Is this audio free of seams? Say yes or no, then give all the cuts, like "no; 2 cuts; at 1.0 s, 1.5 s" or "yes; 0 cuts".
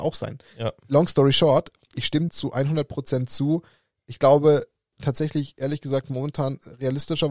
no; 3 cuts; at 1.9 s, 2.3 s, 4.9 s